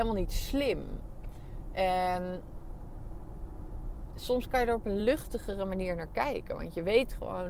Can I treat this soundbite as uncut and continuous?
yes; 0 cuts

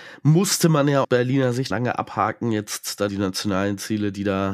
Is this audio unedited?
no; 3 cuts; at 1.0 s, 1.7 s, 3.1 s

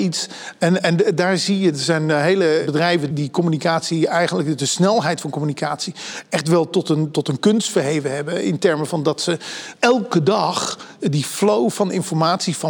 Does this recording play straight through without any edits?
no; 1 cut; at 3.1 s

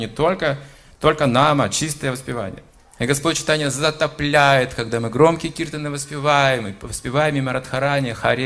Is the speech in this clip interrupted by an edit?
yes; 1 cut; at 2.7 s

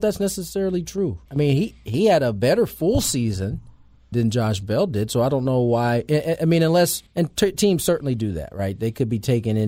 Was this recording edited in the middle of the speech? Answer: yes; 3 cuts; at 1.3 s, 4.1 s, 7.1 s

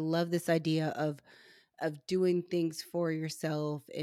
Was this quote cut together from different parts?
no; 0 cuts

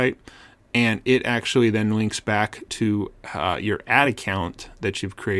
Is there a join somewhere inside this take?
no; 0 cuts

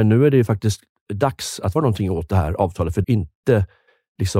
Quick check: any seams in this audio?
yes; 2 cuts; at 1.8 s, 3.0 s

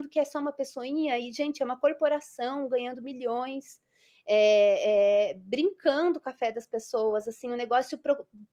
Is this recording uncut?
yes; 0 cuts

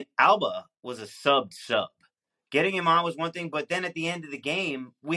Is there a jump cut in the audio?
no; 0 cuts

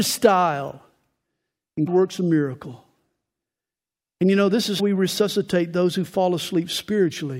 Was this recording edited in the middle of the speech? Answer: yes; 2 cuts; at 1.9 s, 4.8 s

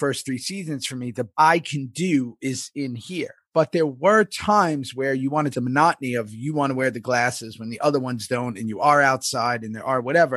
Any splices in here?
yes; 3 cuts; at 1.3 s, 3.4 s, 5.5 s

